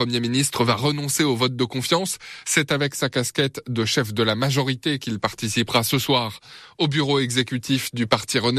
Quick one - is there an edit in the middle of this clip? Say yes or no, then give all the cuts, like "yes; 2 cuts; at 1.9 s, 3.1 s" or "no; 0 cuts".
no; 0 cuts